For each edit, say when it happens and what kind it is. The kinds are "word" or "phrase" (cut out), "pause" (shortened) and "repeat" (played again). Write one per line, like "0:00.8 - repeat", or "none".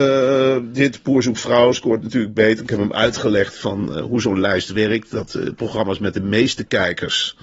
none